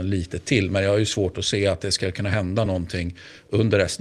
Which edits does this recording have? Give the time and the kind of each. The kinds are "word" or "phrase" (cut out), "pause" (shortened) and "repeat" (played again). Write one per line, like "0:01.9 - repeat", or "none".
none